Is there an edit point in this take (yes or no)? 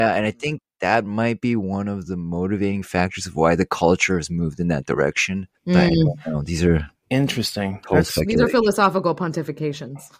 no